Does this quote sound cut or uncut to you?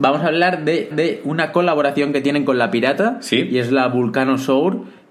cut